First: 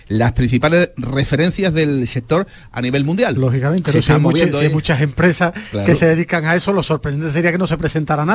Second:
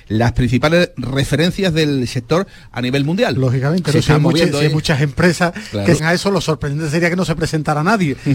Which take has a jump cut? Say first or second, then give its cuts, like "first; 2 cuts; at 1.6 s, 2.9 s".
second; 1 cut; at 6.0 s